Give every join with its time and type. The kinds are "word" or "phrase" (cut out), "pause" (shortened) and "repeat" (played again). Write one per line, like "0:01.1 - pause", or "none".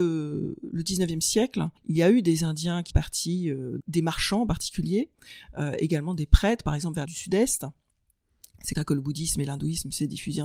0:01.8 - pause
0:02.9 - word
0:03.8 - word
0:07.0 - word
0:08.7 - word